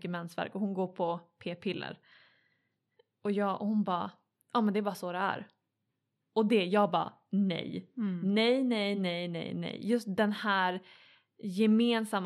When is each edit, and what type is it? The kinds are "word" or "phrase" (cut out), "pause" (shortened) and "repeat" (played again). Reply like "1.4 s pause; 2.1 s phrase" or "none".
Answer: none